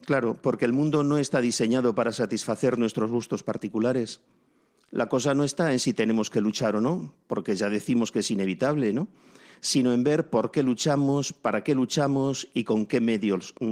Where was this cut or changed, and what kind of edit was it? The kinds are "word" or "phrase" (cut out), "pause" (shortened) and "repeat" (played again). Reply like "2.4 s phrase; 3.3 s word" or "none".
none